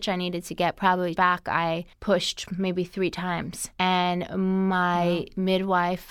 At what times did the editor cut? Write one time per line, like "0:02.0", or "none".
0:01.2
0:01.9
0:03.7

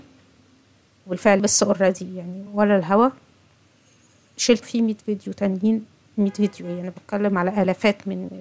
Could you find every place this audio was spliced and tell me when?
0:01.4
0:02.5
0:04.6

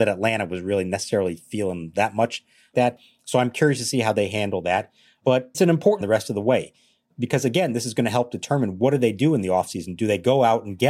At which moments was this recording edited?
0:02.7
0:05.5
0:06.0

